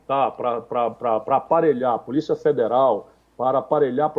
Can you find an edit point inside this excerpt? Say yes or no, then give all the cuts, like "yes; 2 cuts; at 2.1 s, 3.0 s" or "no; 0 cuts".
no; 0 cuts